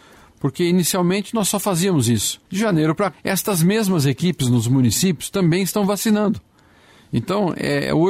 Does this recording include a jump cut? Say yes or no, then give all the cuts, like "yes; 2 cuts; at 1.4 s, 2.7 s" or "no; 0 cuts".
yes; 2 cuts; at 2.5 s, 3.1 s